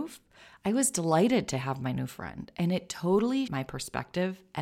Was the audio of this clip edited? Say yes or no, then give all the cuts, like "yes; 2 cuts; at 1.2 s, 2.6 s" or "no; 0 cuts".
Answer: yes; 1 cut; at 3.5 s